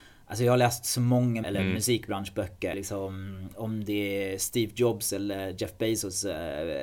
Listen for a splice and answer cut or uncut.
cut